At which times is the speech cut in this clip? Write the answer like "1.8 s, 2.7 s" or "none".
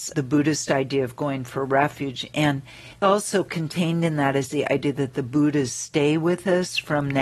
2.9 s

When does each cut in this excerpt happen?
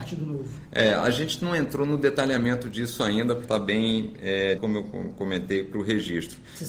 3.4 s, 4.6 s

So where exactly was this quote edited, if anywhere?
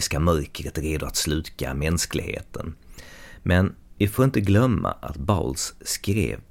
none

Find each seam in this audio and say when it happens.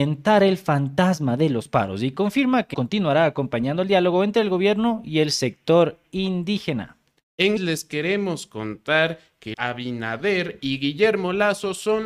2.7 s, 7.6 s, 9.5 s

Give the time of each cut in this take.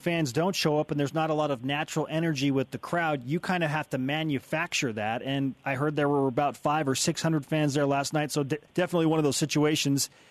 8.7 s

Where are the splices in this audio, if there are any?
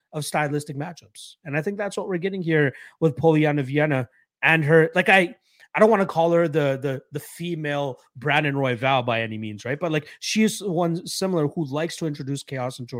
none

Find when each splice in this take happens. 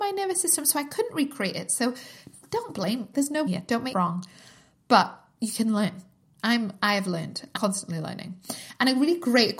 3.1 s, 3.5 s, 3.9 s, 7.6 s

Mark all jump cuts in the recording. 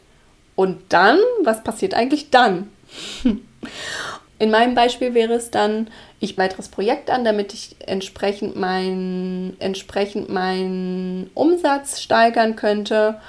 6.4 s, 9.6 s

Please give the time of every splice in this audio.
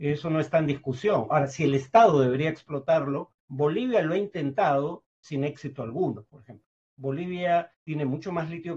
3.4 s, 7.7 s

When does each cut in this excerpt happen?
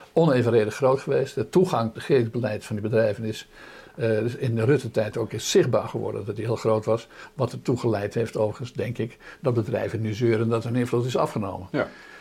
2.0 s

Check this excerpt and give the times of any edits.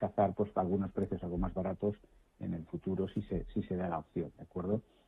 none

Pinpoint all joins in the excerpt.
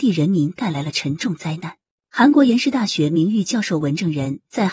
none

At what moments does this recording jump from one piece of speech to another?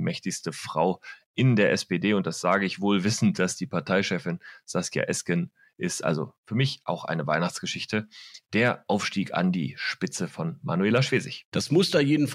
none

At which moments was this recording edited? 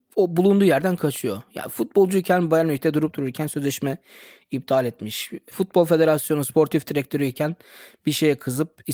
none

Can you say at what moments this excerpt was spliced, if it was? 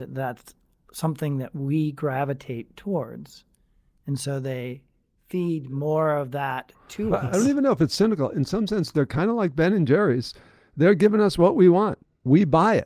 none

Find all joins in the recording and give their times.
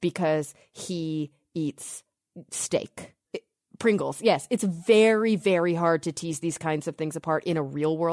none

